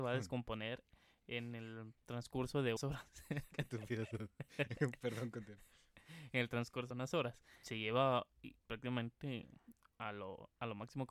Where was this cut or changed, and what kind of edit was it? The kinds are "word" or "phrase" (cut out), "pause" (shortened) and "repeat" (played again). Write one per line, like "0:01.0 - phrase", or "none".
0:02.8 - word
0:06.9 - word
0:08.6 - word